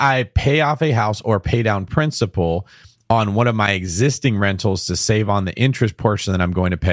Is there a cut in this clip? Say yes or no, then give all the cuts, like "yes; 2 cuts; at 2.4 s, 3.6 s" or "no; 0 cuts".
no; 0 cuts